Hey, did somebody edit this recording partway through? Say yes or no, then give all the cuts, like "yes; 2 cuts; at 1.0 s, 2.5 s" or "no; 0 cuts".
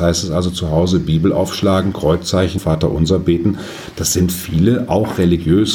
yes; 1 cut; at 2.6 s